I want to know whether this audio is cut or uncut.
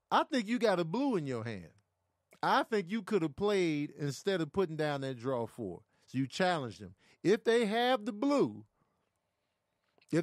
uncut